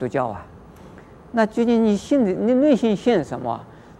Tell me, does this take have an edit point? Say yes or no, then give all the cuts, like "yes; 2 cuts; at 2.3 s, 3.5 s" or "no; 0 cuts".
no; 0 cuts